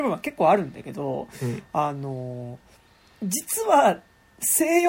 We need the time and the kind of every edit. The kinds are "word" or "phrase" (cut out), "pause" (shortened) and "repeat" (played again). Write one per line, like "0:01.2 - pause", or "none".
none